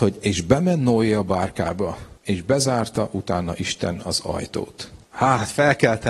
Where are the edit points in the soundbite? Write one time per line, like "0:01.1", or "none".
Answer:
0:02.2
0:05.0